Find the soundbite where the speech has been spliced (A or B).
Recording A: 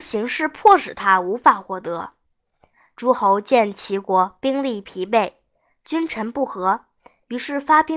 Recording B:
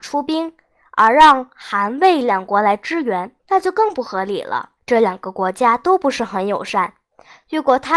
B